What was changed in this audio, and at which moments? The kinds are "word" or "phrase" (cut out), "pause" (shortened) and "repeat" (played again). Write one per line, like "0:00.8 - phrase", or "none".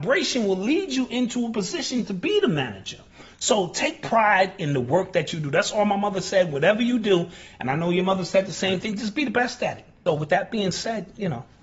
0:10.1 - word